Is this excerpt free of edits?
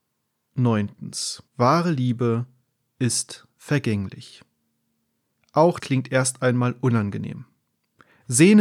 no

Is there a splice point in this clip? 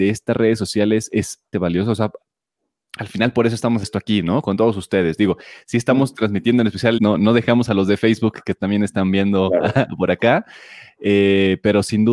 yes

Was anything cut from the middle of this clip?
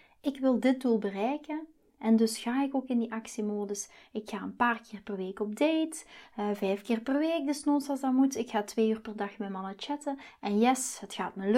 no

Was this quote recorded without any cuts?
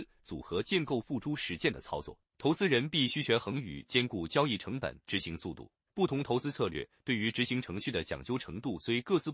no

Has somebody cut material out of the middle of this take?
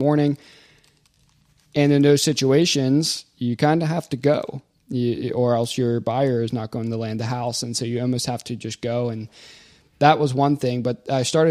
no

